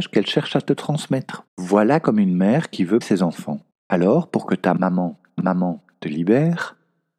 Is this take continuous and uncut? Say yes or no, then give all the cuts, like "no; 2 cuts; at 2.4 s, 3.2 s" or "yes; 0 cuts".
no; 4 cuts; at 1.5 s, 3.0 s, 3.7 s, 5.4 s